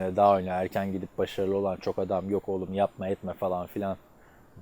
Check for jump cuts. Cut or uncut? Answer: uncut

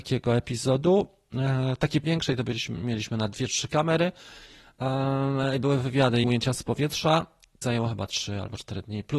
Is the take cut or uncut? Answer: cut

